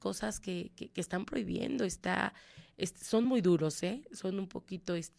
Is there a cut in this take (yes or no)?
no